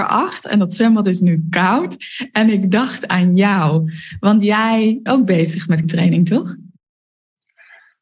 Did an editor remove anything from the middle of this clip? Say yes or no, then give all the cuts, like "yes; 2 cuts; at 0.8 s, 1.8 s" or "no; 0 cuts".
yes; 2 cuts; at 5.1 s, 5.8 s